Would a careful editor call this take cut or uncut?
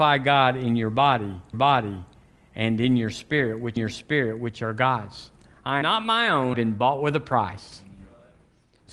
cut